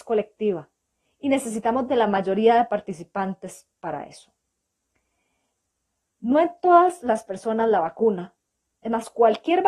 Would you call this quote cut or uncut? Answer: uncut